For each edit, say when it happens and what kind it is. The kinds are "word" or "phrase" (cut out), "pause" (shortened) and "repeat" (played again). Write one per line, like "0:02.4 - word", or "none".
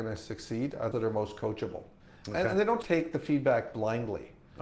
0:00.9 - word
0:02.0 - pause
0:02.8 - word